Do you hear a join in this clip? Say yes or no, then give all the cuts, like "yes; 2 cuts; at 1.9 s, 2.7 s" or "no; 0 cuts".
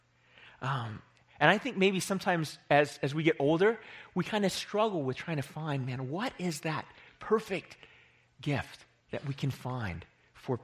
yes; 1 cut; at 9.0 s